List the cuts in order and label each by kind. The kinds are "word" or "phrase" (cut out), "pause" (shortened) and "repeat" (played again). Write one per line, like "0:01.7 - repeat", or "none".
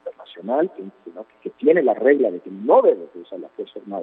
none